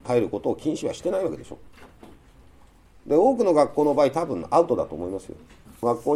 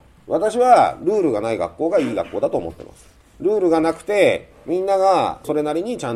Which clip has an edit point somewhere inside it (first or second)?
second